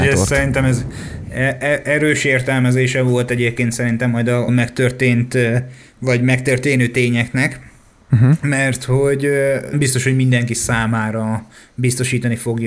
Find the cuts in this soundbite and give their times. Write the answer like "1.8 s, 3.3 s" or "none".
4.5 s, 9.7 s